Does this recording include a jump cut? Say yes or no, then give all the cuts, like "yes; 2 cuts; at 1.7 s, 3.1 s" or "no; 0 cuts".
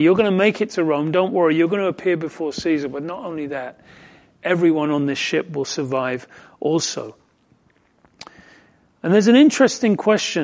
no; 0 cuts